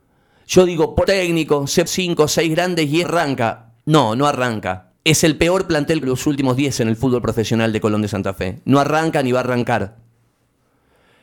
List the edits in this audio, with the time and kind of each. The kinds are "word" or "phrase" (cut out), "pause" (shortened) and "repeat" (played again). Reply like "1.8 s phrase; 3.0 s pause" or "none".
1.0 s phrase; 1.9 s phrase; 3.0 s word; 3.8 s pause; 5.0 s pause; 6.0 s word; 6.8 s word